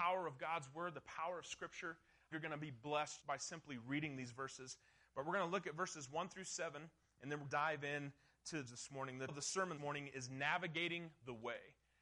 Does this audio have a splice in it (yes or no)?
yes